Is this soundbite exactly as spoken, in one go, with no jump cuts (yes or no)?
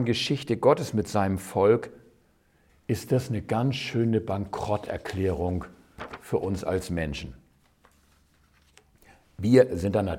yes